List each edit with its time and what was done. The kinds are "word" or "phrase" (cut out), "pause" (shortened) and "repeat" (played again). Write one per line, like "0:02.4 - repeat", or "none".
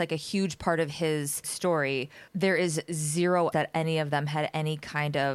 0:01.4 - word
0:02.3 - word
0:03.5 - word